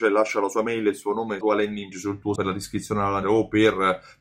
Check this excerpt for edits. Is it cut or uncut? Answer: cut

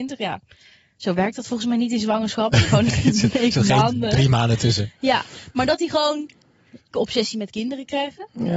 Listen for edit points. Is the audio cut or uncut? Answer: cut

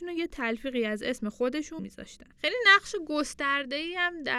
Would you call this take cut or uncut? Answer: cut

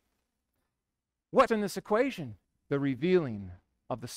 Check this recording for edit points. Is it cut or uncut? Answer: cut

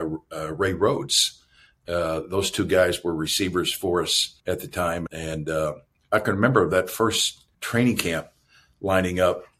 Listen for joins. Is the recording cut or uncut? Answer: cut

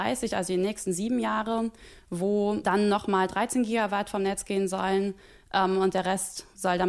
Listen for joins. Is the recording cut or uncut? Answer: uncut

